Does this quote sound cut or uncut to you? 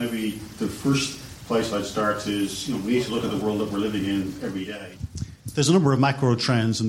uncut